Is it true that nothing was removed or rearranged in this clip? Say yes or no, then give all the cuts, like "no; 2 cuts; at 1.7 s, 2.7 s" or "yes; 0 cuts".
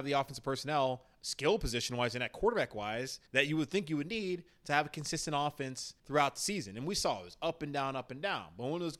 no; 2 cuts; at 3.3 s, 6.0 s